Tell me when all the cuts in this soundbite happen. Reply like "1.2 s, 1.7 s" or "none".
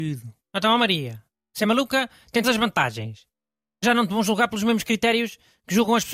2.4 s, 3.8 s